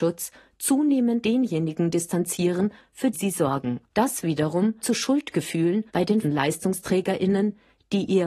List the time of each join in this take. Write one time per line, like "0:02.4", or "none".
0:01.2
0:03.1
0:03.9
0:04.8
0:05.9
0:06.2